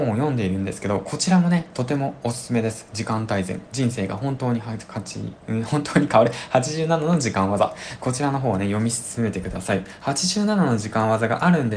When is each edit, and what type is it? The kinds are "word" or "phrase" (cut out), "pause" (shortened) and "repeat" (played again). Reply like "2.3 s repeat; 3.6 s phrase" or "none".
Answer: none